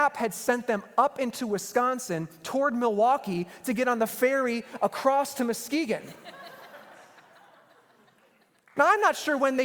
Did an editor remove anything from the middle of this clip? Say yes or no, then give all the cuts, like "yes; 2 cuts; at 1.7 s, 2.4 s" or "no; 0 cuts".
no; 0 cuts